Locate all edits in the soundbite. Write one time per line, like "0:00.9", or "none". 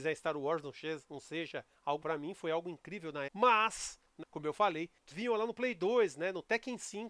0:02.0
0:03.3
0:04.2
0:05.1

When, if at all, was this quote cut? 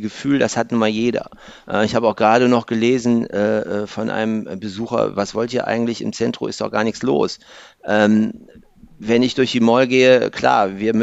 none

